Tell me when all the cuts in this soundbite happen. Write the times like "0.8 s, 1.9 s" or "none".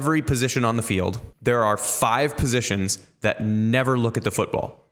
1.3 s

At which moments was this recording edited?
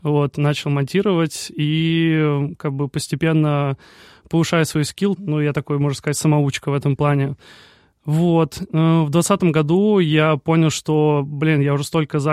5.2 s

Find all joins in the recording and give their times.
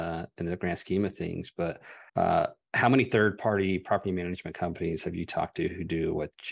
2.1 s

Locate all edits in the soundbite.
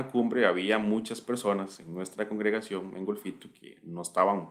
none

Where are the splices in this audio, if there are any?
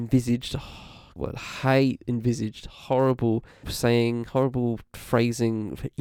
1.2 s, 3.6 s

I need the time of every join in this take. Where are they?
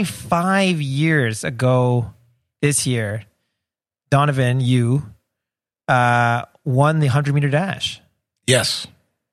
none

